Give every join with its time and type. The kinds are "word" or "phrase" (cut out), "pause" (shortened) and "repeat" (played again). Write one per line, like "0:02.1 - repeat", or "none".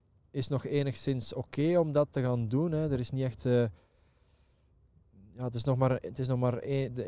none